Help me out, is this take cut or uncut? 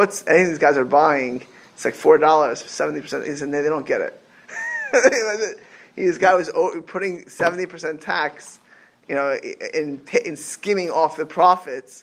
uncut